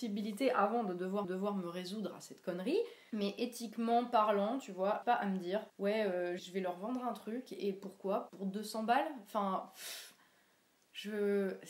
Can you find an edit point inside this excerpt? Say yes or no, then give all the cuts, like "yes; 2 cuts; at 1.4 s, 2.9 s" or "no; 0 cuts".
yes; 5 cuts; at 1.2 s, 5.0 s, 5.7 s, 6.4 s, 8.3 s